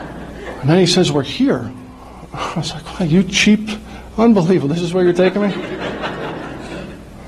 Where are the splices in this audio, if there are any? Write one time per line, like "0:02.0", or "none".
none